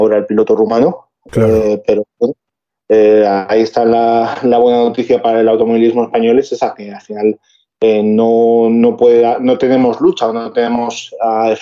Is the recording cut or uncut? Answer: uncut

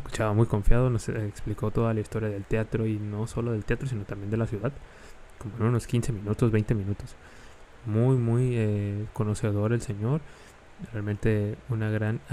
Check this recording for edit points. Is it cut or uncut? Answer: uncut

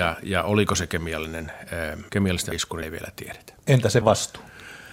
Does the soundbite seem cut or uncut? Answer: cut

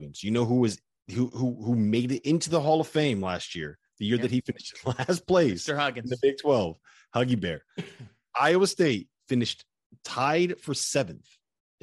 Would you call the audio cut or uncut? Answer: uncut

